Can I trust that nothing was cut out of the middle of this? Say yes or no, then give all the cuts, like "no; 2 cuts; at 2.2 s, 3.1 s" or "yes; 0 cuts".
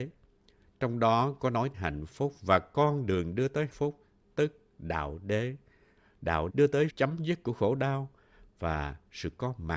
no; 4 cuts; at 1.7 s, 3.7 s, 6.5 s, 6.9 s